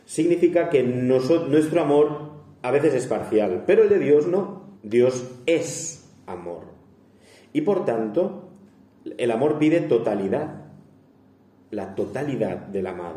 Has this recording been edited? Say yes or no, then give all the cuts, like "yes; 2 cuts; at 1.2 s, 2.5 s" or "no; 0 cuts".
yes; 1 cut; at 4.7 s